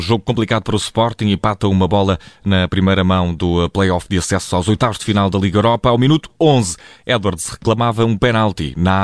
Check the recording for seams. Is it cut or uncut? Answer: uncut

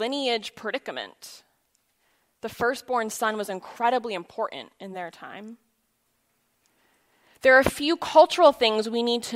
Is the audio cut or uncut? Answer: uncut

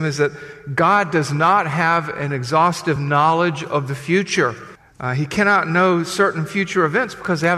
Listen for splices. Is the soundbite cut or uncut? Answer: uncut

